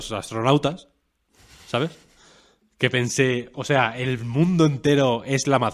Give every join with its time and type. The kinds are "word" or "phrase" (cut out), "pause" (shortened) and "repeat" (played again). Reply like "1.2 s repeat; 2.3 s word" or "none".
none